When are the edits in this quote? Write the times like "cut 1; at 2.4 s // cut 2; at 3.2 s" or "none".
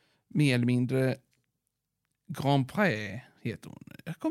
none